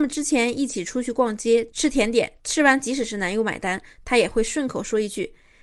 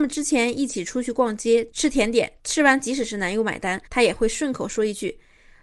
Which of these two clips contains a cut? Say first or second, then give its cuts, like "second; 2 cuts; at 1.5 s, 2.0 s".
second; 1 cut; at 3.9 s